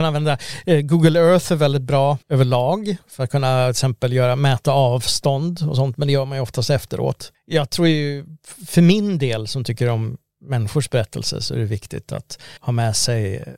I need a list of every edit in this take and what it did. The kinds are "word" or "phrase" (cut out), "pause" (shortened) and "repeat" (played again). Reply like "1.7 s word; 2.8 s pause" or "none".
2.2 s pause; 12.6 s pause